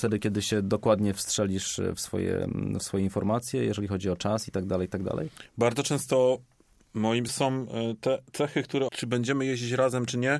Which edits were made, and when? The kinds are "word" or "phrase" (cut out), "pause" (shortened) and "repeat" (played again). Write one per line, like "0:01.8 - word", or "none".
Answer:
0:07.3 - phrase
0:08.9 - word